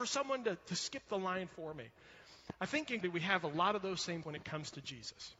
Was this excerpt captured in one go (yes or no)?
no